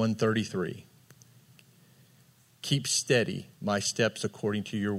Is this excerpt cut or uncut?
cut